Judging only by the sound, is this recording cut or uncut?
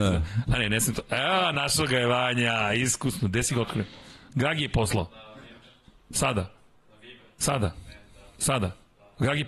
uncut